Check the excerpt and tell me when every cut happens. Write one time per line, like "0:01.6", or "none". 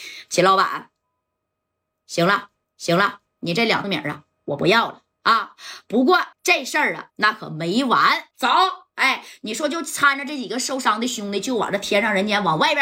0:02.6
0:03.8
0:06.3
0:07.1
0:08.3